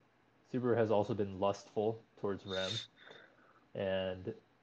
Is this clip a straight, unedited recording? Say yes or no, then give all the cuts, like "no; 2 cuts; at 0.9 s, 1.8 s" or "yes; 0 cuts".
yes; 0 cuts